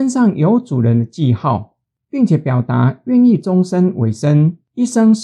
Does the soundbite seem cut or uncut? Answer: uncut